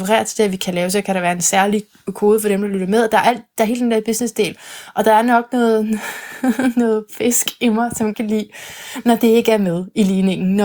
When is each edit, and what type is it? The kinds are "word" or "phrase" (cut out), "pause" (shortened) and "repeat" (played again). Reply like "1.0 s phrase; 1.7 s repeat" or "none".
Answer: 8.1 s word